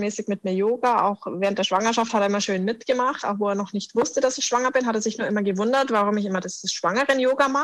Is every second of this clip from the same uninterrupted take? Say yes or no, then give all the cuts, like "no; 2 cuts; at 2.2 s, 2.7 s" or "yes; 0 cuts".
yes; 0 cuts